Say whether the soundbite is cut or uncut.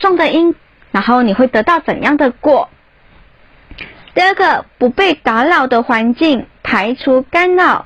uncut